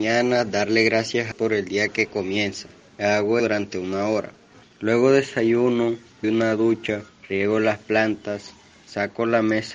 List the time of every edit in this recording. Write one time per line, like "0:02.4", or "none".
0:01.3
0:03.4
0:06.2